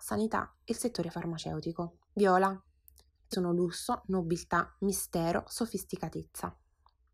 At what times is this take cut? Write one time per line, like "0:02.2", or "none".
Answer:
0:02.0
0:03.3